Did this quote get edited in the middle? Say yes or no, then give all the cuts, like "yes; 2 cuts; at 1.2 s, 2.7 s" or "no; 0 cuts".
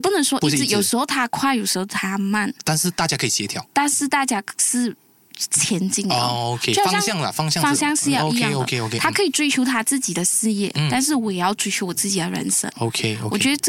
no; 0 cuts